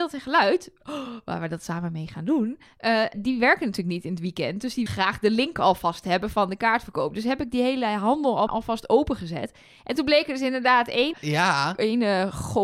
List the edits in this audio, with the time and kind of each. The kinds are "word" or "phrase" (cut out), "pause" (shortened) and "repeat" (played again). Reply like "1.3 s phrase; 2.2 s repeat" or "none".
3.1 s word; 4.9 s word; 8.5 s word; 11.1 s word